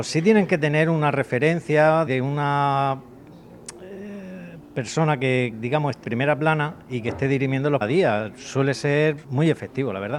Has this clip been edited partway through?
yes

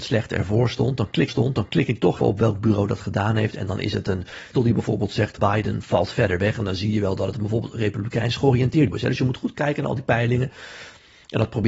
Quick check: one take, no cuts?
no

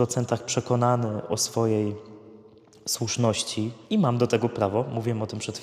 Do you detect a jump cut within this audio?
yes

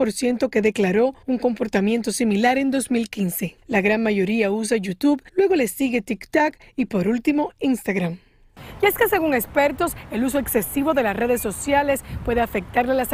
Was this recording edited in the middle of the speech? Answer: yes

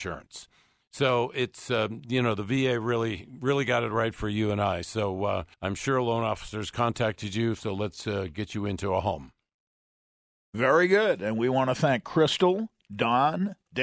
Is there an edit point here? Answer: yes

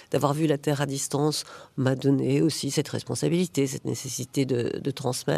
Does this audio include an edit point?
no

